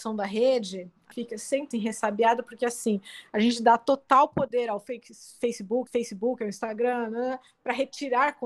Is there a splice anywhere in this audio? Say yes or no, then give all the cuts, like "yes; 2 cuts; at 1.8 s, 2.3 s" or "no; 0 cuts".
yes; 3 cuts; at 1.1 s, 1.7 s, 5.9 s